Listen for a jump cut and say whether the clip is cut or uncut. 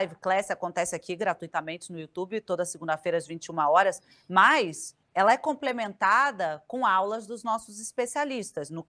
cut